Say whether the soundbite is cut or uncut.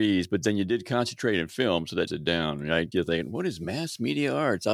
cut